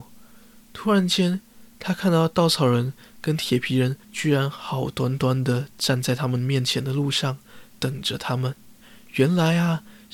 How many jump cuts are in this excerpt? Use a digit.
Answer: 3